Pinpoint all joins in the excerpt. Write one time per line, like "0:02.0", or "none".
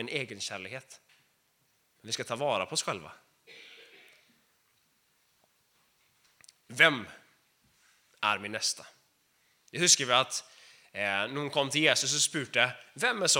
none